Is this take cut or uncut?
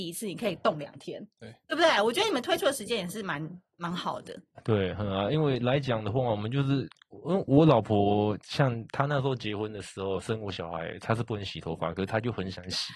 cut